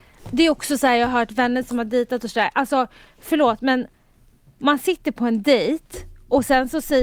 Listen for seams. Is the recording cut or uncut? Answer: uncut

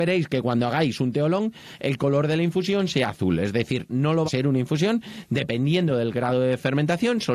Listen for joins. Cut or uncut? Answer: cut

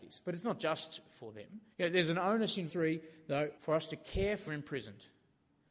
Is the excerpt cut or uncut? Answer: cut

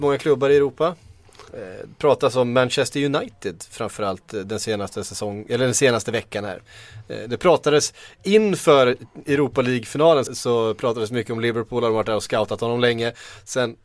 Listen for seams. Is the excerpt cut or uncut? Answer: cut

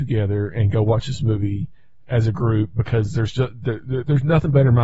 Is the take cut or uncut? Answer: uncut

